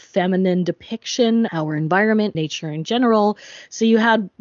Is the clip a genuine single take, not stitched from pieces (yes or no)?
no